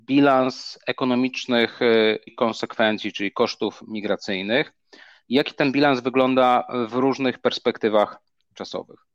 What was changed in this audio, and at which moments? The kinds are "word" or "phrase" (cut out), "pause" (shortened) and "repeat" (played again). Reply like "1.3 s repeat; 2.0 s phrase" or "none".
2.3 s word